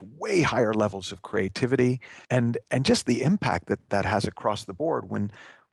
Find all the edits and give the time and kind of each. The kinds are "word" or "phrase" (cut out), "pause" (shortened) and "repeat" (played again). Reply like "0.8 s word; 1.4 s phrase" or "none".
2.2 s pause